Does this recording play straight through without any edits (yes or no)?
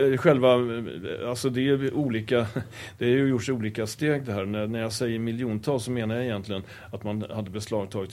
yes